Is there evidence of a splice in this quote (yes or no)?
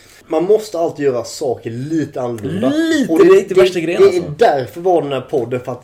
no